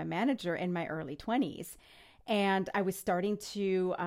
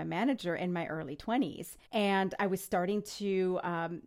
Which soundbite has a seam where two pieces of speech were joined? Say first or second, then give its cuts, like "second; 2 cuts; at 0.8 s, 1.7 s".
second; 1 cut; at 1.9 s